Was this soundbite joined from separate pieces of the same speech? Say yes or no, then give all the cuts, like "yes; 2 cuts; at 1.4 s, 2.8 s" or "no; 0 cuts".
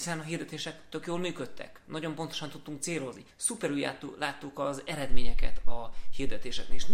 yes; 1 cut; at 3.3 s